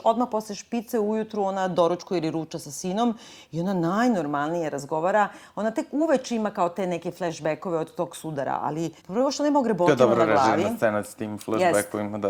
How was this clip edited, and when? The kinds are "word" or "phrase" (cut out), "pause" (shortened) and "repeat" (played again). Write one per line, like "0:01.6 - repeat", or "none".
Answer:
0:09.0 - pause

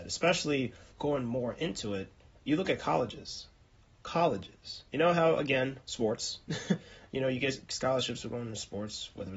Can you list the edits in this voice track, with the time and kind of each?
0:00.9 - pause
0:02.3 - pause
0:04.9 - pause

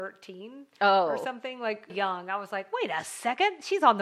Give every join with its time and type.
0:01.9 - word

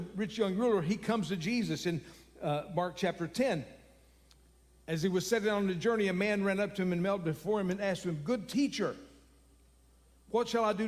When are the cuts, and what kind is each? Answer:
none

